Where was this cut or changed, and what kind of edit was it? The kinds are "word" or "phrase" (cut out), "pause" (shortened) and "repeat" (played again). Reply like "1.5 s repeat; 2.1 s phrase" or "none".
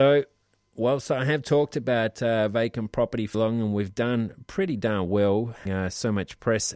3.3 s word; 5.7 s word